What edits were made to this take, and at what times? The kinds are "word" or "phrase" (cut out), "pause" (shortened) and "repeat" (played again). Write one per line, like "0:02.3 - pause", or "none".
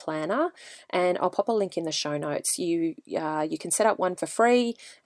0:04.2 - word